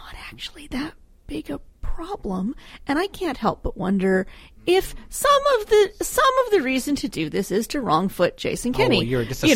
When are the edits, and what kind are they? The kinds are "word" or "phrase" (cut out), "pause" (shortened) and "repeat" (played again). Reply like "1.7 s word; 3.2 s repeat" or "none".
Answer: none